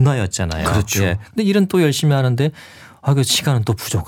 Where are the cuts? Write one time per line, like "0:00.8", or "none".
none